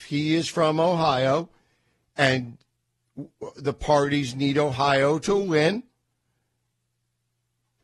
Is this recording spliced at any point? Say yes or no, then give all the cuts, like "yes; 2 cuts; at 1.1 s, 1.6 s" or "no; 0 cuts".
no; 0 cuts